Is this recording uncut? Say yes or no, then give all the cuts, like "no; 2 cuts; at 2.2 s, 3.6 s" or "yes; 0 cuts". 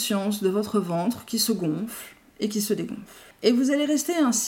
yes; 0 cuts